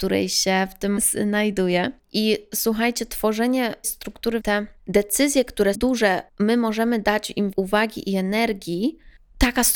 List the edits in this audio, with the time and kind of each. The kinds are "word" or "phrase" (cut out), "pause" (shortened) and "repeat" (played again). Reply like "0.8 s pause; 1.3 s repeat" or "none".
1.0 s word; 3.8 s word; 4.4 s phrase; 4.8 s pause; 5.7 s word; 6.3 s pause; 7.5 s phrase

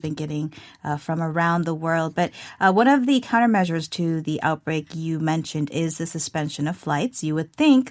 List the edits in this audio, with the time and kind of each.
none

